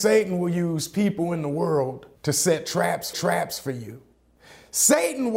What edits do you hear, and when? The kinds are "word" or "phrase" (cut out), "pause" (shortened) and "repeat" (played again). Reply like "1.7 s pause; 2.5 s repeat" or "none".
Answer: 2.2 s pause; 3.1 s repeat; 4.4 s pause